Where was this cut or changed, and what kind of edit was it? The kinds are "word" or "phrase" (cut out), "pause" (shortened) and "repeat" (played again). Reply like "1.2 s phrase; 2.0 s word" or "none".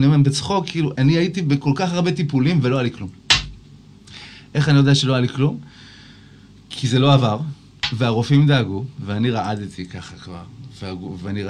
0.9 s word